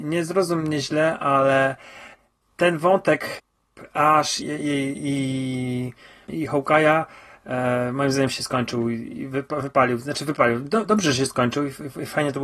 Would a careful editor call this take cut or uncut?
cut